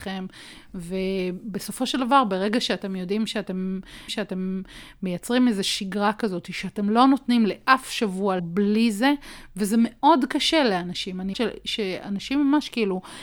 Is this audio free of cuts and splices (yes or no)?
no